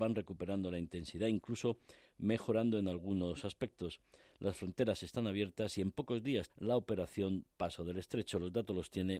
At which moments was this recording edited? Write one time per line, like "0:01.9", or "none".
0:06.5